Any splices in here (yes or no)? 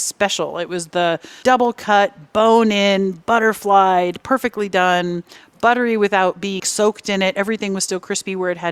yes